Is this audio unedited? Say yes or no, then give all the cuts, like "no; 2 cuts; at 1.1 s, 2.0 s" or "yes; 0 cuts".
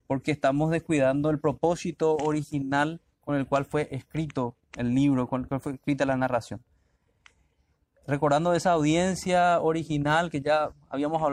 yes; 0 cuts